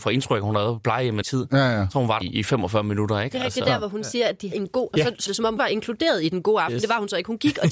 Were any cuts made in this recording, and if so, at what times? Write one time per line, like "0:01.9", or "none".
0:01.2
0:02.2
0:04.5
0:04.9
0:05.3
0:05.6